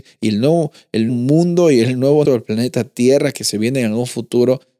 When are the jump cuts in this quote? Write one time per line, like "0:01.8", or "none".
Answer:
0:01.1
0:02.2